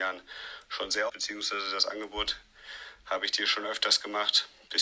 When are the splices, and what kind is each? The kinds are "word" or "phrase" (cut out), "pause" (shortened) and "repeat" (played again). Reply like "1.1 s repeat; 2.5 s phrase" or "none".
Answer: 1.1 s phrase